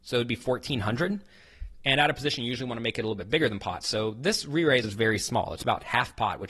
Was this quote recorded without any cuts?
no; 1 cut; at 4.8 s

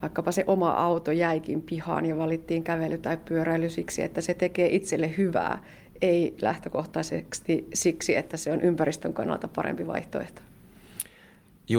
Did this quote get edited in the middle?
no; 0 cuts

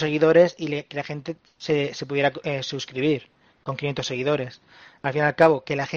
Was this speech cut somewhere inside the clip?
no; 0 cuts

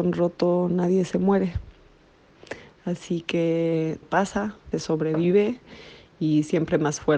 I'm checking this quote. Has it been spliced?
yes; 2 cuts; at 4.0 s, 4.7 s

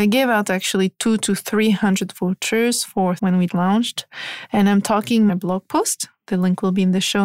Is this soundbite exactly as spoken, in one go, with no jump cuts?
no; 3 cuts; at 3.2 s, 3.5 s, 5.3 s

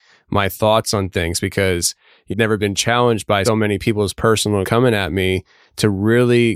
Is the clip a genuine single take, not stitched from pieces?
no; 3 cuts; at 2.3 s, 3.4 s, 4.6 s

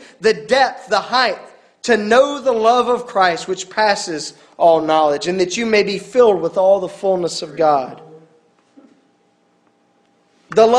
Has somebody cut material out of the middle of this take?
no; 0 cuts

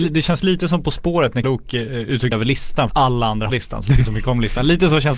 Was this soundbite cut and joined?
yes; 5 cuts; at 1.4 s, 2.3 s, 2.9 s, 3.5 s, 4.0 s

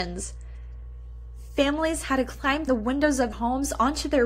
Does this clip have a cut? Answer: yes; 2 cuts; at 2.7 s, 3.3 s

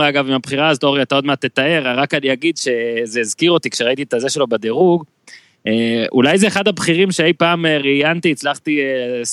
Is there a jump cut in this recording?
no; 0 cuts

